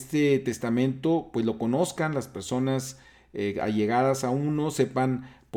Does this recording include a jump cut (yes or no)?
no